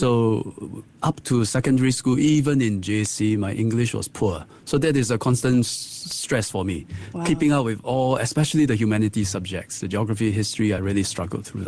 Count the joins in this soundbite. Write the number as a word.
zero